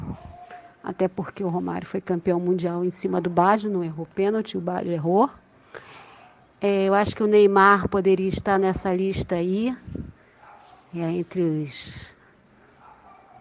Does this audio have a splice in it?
no; 0 cuts

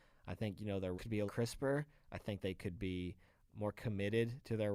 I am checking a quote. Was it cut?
yes; 4 cuts; at 0.9 s, 1.3 s, 2.4 s, 3.5 s

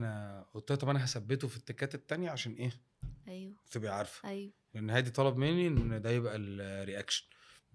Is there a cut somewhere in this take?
no; 0 cuts

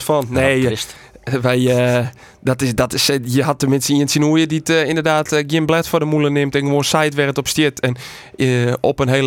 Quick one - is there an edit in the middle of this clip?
no; 0 cuts

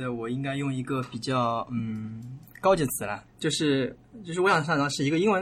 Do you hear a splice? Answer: yes; 1 cut; at 3.3 s

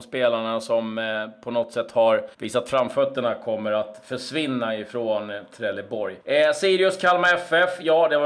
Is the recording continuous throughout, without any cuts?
no; 2 cuts; at 2.3 s, 6.2 s

